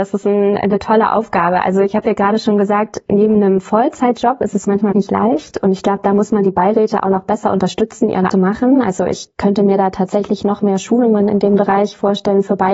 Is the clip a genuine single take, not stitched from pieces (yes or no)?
no